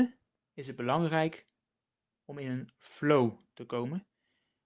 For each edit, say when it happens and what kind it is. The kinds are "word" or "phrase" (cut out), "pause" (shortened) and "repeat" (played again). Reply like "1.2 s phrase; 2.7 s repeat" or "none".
none